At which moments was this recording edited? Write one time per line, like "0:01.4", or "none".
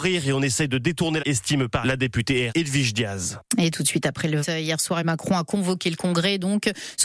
0:01.2
0:01.8
0:02.5
0:04.4
0:05.0